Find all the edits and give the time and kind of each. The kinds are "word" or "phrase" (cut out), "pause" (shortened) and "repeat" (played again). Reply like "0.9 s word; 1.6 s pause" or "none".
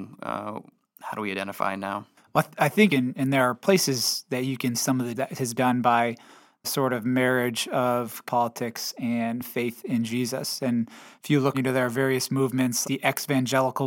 2.9 s word; 4.7 s word; 5.2 s word; 5.6 s word; 6.6 s word; 8.3 s word; 11.5 s word; 12.8 s word